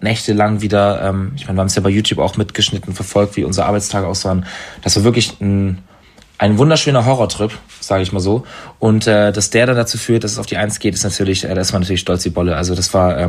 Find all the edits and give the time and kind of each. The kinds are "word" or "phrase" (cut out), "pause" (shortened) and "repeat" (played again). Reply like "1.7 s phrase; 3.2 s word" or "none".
none